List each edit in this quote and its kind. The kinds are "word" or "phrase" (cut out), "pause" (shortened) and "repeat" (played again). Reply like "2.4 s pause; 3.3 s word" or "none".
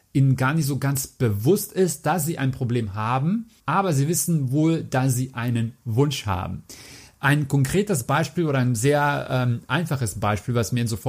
3.6 s pause